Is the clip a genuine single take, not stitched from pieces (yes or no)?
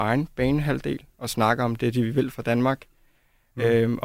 yes